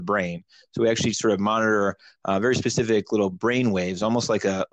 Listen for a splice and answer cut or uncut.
uncut